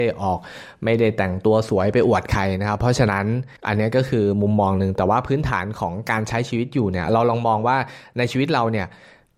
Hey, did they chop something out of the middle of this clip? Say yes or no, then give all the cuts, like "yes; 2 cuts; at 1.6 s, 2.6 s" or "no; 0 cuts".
yes; 1 cut; at 3.6 s